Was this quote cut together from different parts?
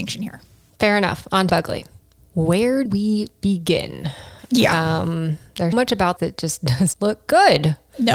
yes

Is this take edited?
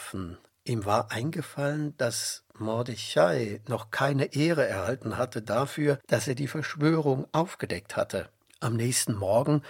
no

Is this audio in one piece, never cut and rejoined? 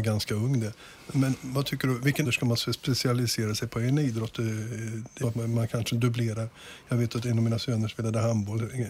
no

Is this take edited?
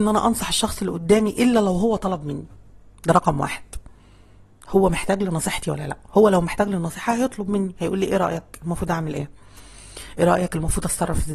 no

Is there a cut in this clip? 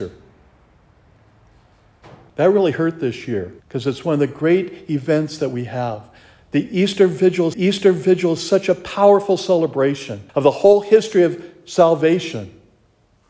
yes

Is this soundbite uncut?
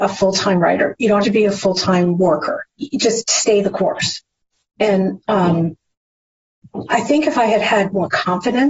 no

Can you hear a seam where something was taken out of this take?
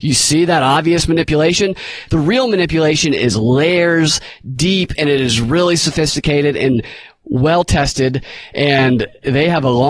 no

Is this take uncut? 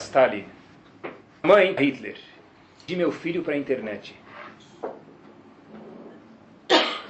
no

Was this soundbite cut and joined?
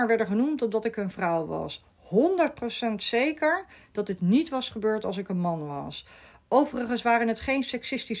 no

